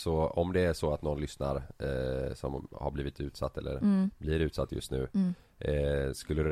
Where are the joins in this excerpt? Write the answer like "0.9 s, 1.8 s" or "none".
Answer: none